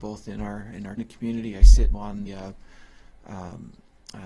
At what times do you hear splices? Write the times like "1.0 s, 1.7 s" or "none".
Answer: 1.0 s, 1.9 s, 2.3 s